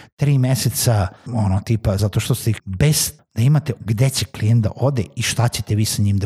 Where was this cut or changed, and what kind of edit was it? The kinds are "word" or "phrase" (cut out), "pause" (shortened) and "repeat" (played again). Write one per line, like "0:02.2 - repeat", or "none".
0:01.3 - word
0:02.0 - word
0:02.6 - word
0:03.2 - word
0:03.8 - word